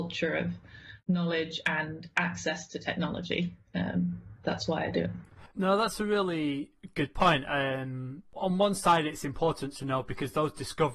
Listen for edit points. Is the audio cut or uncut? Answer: cut